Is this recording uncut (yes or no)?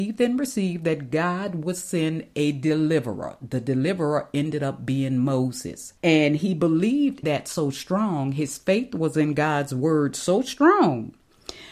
no